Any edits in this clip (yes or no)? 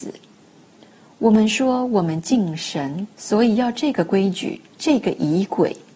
yes